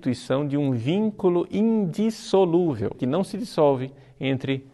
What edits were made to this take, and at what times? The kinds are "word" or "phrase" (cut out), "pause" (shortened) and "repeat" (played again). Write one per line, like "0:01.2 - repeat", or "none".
0:03.0 - word